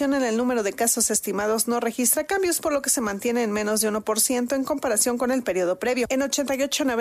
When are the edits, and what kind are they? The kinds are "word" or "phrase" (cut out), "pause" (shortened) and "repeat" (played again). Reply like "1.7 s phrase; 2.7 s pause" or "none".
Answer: none